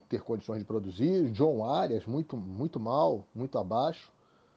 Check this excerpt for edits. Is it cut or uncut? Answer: uncut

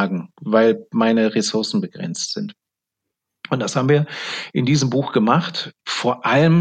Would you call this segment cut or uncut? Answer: uncut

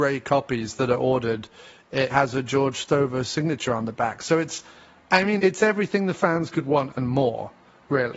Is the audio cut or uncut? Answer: cut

